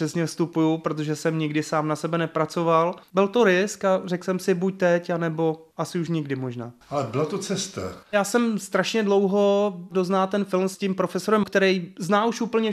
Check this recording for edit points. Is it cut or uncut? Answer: cut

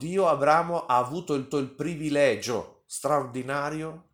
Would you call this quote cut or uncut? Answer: cut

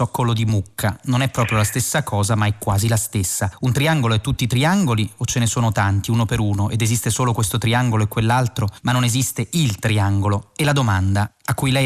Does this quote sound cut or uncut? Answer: uncut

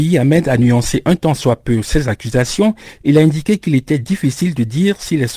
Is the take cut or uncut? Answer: uncut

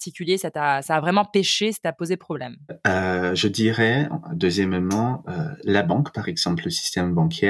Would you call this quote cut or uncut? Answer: uncut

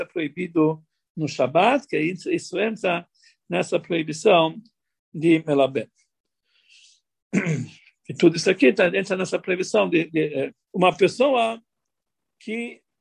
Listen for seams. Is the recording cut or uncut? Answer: cut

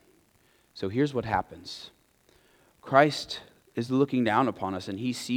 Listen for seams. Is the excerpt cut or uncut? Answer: uncut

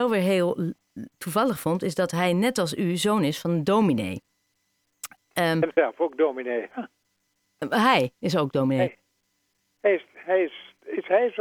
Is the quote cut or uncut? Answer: uncut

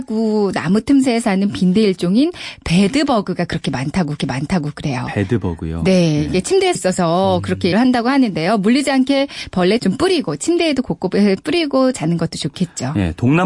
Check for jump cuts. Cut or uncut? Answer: cut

